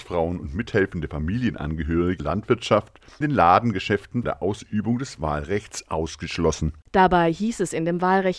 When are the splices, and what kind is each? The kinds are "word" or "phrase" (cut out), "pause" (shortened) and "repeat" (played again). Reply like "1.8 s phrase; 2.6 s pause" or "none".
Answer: 2.2 s phrase; 3.2 s phrase; 4.2 s word; 6.8 s pause